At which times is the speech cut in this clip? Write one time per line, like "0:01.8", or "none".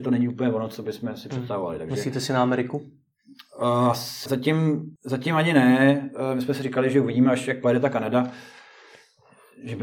0:04.3
0:05.0